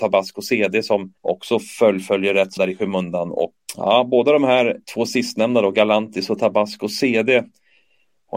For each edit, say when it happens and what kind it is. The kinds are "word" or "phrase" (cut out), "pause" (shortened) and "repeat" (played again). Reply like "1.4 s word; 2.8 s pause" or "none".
1.2 s pause; 2.6 s word; 3.7 s word; 4.8 s pause

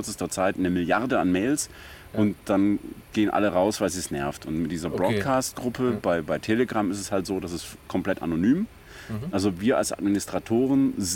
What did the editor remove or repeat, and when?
none

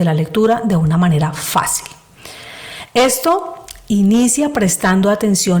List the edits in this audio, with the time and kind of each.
none

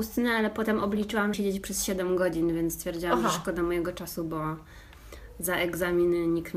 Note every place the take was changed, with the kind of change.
1.3 s phrase

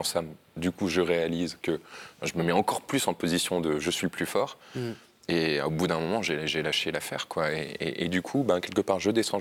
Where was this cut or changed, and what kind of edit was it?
none

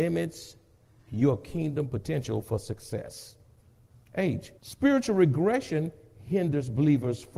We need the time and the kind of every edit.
4.6 s pause

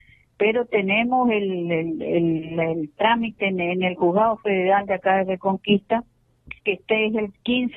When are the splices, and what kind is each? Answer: 6.6 s pause

